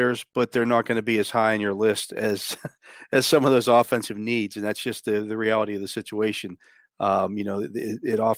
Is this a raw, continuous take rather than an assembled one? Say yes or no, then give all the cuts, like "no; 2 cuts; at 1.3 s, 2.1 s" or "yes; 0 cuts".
yes; 0 cuts